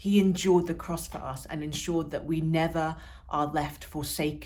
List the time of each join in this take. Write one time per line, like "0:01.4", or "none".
none